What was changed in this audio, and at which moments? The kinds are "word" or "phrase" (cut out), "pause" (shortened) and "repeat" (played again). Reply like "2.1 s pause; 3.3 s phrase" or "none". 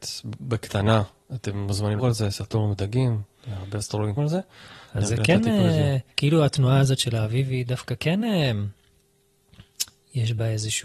2.0 s word; 4.2 s word; 6.1 s pause